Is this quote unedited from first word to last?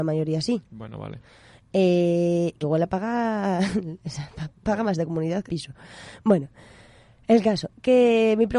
no; 2 cuts; at 2.6 s, 5.5 s

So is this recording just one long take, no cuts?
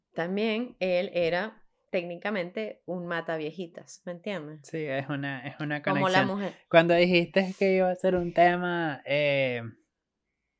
yes; 0 cuts

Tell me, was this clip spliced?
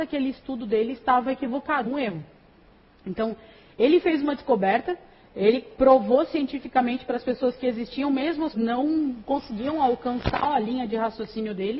yes; 3 cuts; at 1.9 s, 5.8 s, 8.5 s

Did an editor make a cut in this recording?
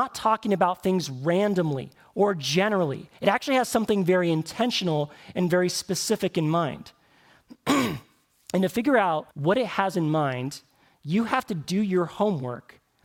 yes; 2 cuts; at 3.2 s, 9.3 s

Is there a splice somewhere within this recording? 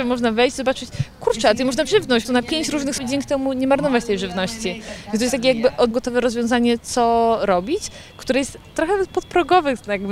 yes; 4 cuts; at 1.9 s, 2.2 s, 3.0 s, 5.9 s

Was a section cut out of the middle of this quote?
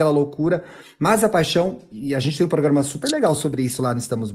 no; 0 cuts

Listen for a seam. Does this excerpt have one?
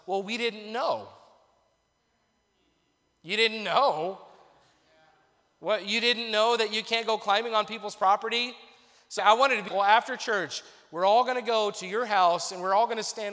yes; 2 cuts; at 9.2 s, 9.7 s

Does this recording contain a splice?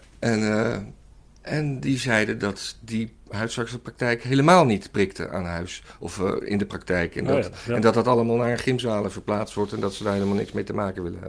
no; 0 cuts

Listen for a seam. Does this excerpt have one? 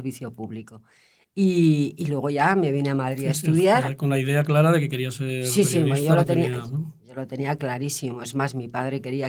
no; 0 cuts

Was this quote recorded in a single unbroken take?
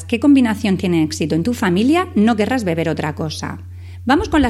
yes; 0 cuts

